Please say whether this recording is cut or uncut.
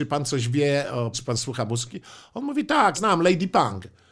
cut